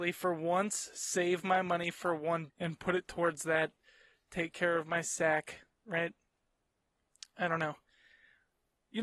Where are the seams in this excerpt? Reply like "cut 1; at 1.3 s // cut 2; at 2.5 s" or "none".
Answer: cut 1; at 2.5 s